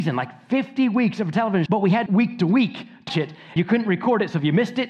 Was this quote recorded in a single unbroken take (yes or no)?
no